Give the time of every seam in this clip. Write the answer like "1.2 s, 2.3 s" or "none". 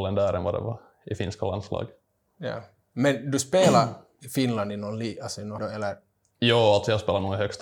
5.6 s